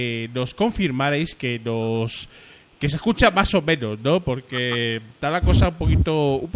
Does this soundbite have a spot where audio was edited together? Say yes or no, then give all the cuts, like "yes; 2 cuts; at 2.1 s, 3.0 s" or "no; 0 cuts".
no; 0 cuts